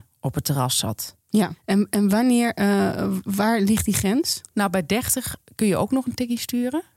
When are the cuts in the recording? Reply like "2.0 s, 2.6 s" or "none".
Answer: 4.5 s